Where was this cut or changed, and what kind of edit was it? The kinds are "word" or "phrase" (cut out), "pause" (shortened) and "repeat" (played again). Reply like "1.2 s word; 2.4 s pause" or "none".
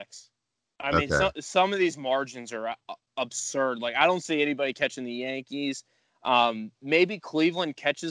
none